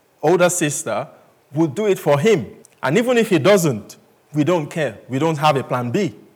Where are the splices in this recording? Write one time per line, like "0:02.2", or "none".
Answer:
0:02.6